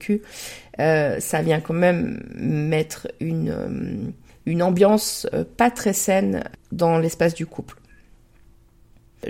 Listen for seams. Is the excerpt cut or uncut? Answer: uncut